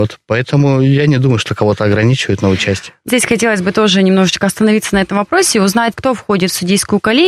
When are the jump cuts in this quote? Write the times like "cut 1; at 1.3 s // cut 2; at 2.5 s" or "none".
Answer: cut 1; at 3.1 s // cut 2; at 5.9 s